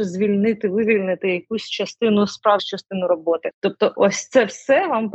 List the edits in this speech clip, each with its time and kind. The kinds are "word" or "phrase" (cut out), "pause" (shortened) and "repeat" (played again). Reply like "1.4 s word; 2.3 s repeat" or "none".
2.6 s word